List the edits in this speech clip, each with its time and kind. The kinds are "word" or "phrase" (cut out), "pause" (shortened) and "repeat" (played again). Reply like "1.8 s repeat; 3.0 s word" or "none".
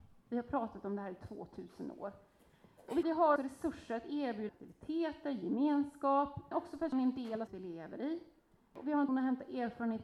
3.0 s word; 3.4 s word; 4.5 s word; 6.5 s word; 6.9 s word; 7.5 s word; 9.1 s word